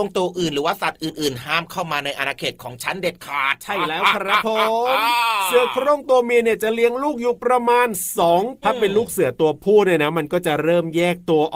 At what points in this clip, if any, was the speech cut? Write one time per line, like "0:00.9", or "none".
0:08.6